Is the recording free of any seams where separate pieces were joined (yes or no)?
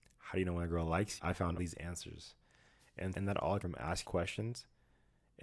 no